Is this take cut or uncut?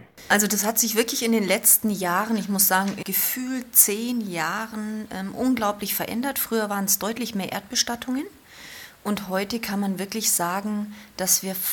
cut